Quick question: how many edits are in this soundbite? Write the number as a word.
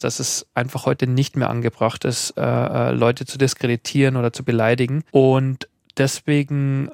one